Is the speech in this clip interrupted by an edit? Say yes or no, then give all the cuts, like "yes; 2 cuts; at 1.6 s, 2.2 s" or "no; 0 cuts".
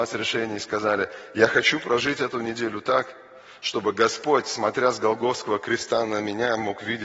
no; 0 cuts